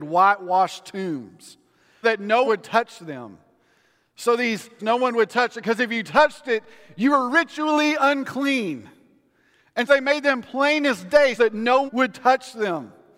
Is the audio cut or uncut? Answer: cut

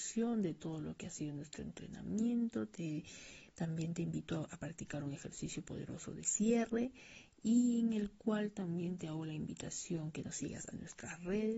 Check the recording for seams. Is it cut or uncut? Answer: uncut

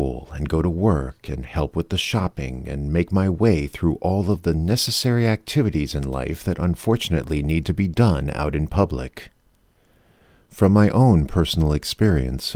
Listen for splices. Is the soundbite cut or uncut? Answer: uncut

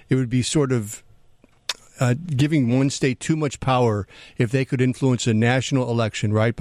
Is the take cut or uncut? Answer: uncut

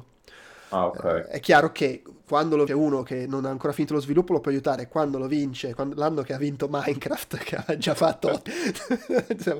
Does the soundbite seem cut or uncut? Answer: cut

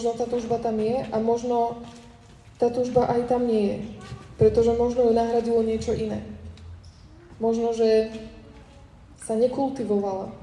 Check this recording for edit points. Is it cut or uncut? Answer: uncut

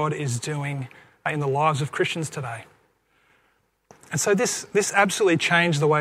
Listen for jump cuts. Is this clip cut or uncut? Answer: uncut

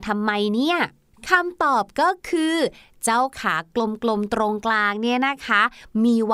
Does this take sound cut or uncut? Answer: uncut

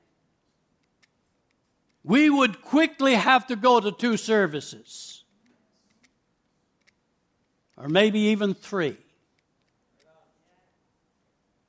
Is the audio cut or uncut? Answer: uncut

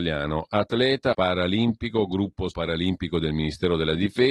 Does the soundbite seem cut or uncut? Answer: cut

